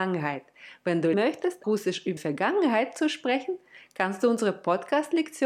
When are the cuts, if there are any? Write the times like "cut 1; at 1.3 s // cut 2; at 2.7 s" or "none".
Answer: cut 1; at 1.1 s // cut 2; at 1.6 s // cut 3; at 2.2 s